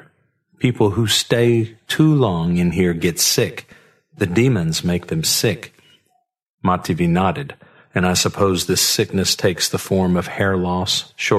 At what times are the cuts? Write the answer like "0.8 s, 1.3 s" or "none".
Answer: none